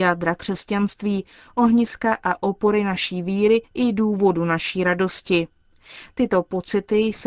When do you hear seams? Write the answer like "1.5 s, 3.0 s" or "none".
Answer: 3.6 s

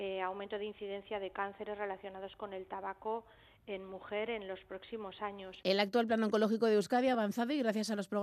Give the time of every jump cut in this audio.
none

